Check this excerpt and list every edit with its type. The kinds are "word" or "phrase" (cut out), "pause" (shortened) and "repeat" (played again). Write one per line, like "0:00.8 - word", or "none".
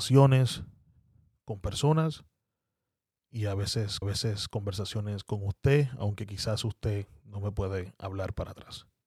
0:04.0 - repeat